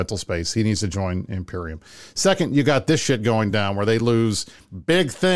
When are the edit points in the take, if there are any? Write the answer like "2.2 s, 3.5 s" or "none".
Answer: none